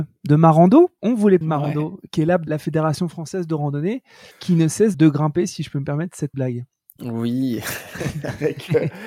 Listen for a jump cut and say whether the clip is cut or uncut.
cut